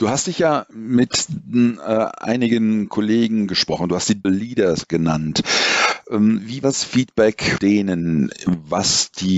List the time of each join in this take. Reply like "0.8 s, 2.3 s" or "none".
4.2 s, 6.6 s, 7.6 s

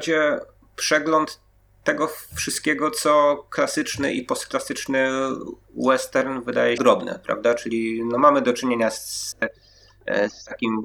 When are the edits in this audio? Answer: 6.8 s

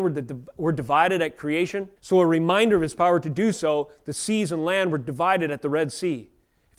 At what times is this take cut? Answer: 2.0 s

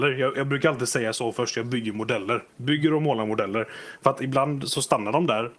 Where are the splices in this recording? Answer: 2.5 s

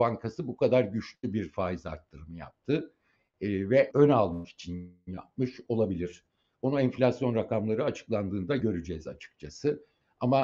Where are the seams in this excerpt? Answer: 3.9 s

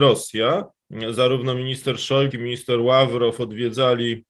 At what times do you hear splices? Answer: 2.3 s

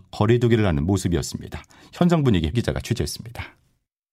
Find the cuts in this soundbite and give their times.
2.5 s

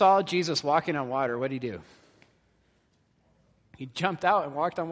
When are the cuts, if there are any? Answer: none

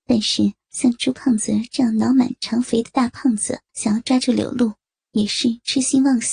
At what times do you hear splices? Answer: 3.7 s

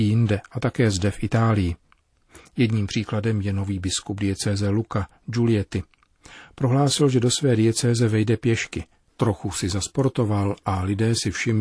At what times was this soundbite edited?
none

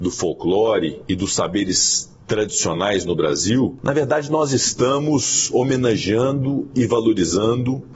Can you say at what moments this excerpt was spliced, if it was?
none

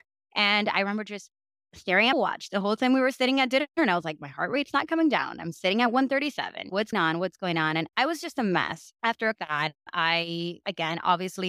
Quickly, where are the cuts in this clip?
2.1 s, 3.7 s, 6.9 s, 7.9 s, 9.4 s

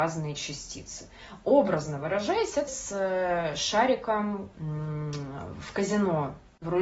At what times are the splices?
2.7 s, 4.5 s

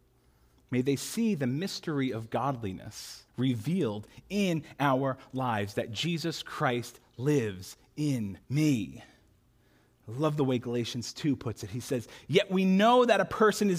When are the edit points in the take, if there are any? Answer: 3.3 s, 8.4 s

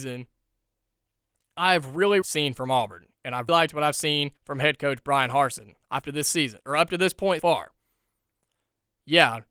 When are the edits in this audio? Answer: 2.2 s, 3.5 s, 4.4 s, 6.0 s, 7.4 s

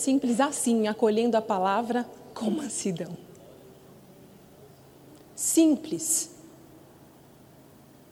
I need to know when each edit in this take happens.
none

